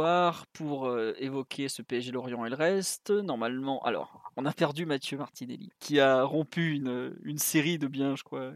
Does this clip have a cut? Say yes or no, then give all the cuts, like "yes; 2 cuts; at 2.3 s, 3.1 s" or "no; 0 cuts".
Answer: yes; 1 cut; at 5.7 s